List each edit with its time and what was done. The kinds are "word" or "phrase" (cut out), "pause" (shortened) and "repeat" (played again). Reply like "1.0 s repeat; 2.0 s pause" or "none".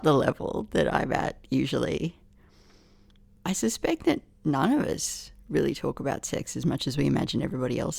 none